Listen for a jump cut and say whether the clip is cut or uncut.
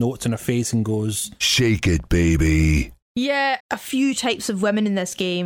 cut